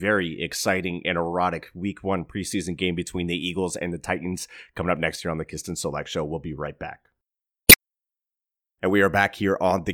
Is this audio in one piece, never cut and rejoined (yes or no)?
yes